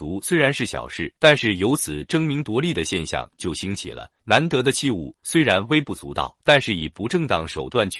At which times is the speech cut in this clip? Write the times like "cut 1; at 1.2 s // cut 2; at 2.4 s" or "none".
cut 1; at 1.2 s // cut 2; at 4.2 s // cut 3; at 6.4 s